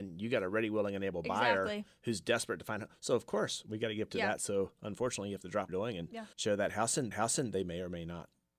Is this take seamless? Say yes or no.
no